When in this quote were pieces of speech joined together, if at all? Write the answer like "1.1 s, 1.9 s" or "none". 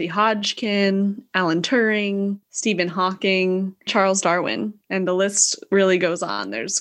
2.4 s, 3.9 s, 4.8 s